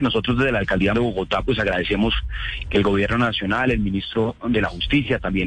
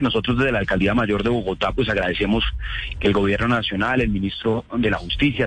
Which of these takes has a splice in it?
first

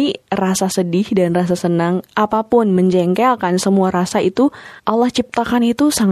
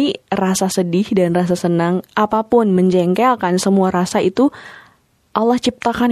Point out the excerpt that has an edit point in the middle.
first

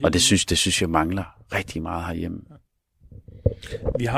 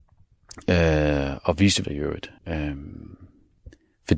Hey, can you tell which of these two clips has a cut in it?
second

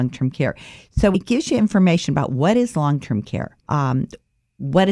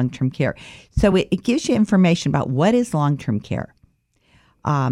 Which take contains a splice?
first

